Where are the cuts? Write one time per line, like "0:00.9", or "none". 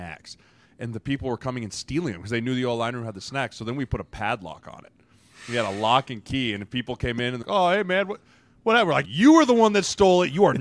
0:07.4
0:09.0